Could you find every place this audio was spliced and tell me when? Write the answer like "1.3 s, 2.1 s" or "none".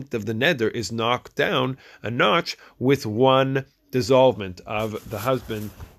none